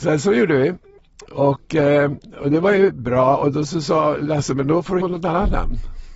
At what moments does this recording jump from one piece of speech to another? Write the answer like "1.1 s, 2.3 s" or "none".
5.0 s